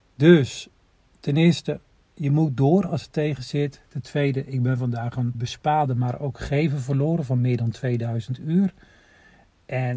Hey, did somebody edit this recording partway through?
yes; 2 cuts; at 2.0 s, 5.3 s

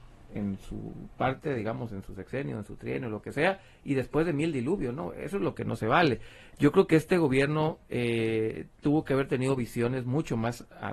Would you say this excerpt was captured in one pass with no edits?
yes; 0 cuts

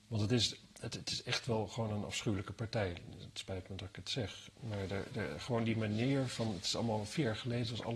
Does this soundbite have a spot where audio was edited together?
no; 0 cuts

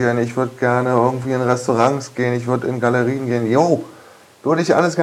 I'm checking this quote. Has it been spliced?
no; 0 cuts

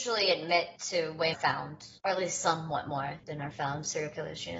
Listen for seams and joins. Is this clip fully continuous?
no; 2 cuts; at 1.3 s, 3.2 s

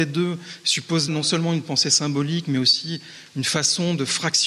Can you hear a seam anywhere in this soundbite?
yes; 1 cut; at 1.1 s

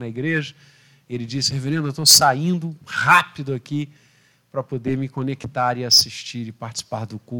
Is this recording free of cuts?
no; 1 cut; at 2.8 s

